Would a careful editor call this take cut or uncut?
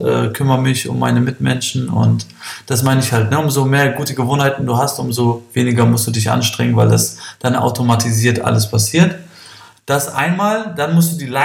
uncut